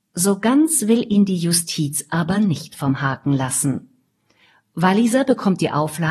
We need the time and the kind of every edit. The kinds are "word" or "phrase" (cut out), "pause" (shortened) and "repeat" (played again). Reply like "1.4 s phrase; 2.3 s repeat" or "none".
none